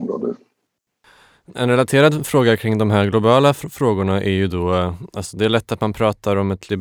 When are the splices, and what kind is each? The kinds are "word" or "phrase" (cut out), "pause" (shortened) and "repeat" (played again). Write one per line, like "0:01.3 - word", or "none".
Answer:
none